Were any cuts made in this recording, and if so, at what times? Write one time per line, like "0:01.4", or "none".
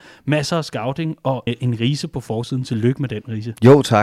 0:01.5